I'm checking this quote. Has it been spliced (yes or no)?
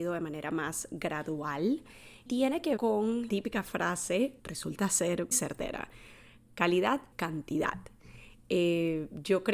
yes